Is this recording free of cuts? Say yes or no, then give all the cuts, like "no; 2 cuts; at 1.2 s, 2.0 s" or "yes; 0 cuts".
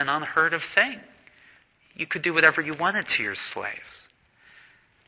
yes; 0 cuts